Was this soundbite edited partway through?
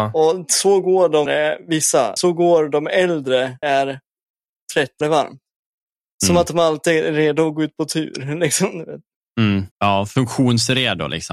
yes; 5 cuts; at 1.3 s, 2.2 s, 3.6 s, 5.0 s, 9.7 s

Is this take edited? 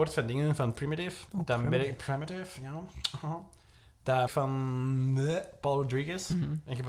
yes; 3 cuts; at 1.3 s, 2.0 s, 4.3 s

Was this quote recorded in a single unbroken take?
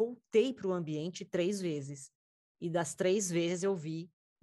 yes; 0 cuts

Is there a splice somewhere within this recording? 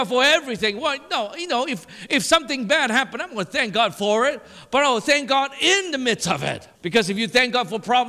yes; 1 cut; at 6.8 s

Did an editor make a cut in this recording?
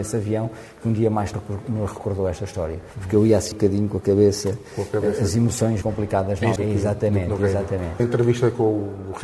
yes; 5 cuts; at 1.3 s, 3.5 s, 5.8 s, 6.6 s, 8.0 s

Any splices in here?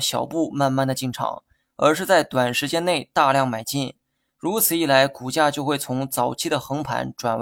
no; 0 cuts

